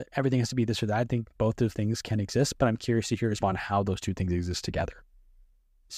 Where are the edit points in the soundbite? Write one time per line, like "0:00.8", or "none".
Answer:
0:01.7
0:03.4